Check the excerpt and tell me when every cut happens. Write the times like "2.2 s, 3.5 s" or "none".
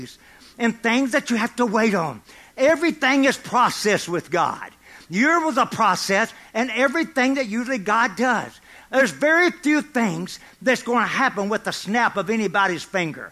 none